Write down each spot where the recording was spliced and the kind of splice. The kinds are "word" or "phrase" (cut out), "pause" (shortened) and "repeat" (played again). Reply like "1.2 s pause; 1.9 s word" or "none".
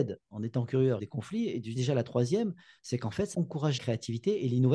1.0 s word; 1.8 s word; 3.3 s word; 3.8 s word